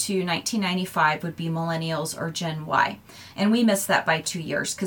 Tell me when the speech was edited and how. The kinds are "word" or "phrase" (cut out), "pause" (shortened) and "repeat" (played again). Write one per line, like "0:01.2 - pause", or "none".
none